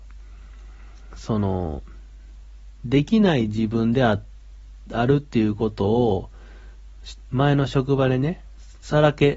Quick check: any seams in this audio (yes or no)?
no